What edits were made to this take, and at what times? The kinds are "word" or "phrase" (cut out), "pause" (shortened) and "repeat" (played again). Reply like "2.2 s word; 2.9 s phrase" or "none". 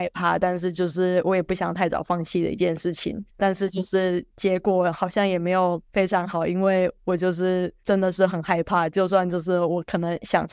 3.3 s pause; 5.9 s pause